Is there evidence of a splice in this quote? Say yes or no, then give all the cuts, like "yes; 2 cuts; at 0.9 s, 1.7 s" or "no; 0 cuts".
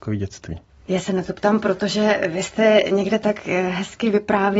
no; 0 cuts